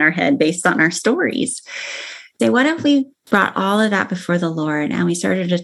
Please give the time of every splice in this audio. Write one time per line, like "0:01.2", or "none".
0:02.4

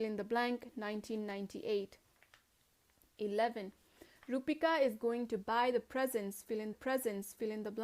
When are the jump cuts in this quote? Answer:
0:06.7

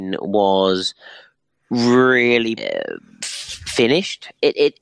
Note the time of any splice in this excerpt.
0:02.6

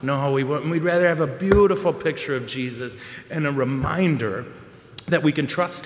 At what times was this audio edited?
none

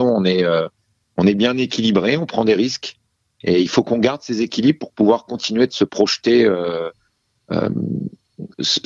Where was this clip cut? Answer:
none

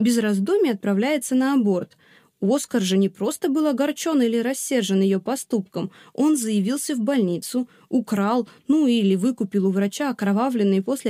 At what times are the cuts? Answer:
none

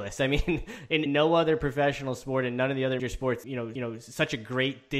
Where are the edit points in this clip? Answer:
0:01.1
0:03.0
0:03.4
0:03.8

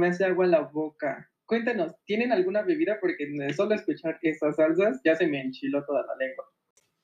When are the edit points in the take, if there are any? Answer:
none

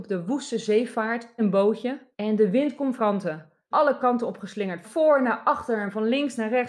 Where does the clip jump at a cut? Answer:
0:01.4
0:02.1
0:03.0
0:03.7
0:04.8

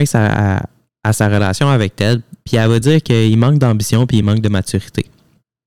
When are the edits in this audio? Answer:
none

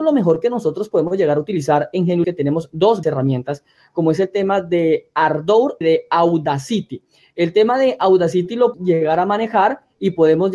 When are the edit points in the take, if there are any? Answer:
0:02.2
0:03.0
0:05.8
0:08.7

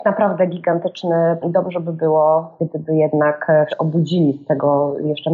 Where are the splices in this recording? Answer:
0:01.4
0:03.7

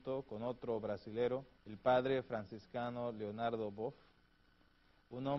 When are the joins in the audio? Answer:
0:01.6

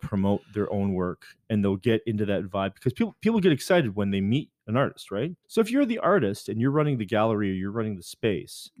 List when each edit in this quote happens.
0:05.4

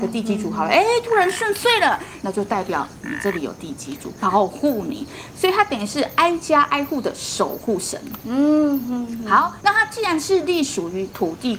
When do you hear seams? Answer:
none

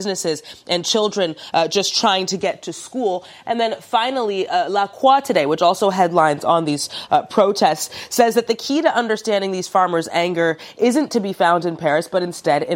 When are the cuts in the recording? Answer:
none

